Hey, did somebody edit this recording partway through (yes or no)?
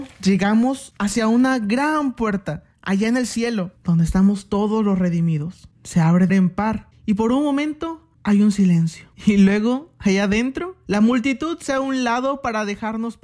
yes